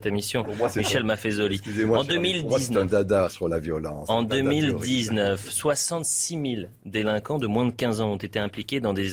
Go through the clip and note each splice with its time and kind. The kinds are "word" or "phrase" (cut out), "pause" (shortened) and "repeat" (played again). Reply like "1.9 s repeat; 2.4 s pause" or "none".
3.3 s word